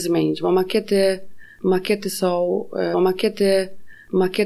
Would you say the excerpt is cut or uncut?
cut